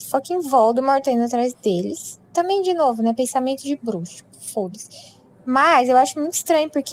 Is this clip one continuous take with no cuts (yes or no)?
yes